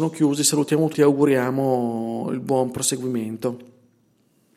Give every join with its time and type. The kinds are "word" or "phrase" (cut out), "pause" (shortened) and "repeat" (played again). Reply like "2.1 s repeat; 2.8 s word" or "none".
0.9 s word